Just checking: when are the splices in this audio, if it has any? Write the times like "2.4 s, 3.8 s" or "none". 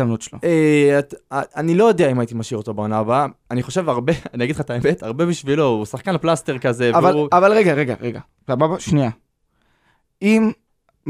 none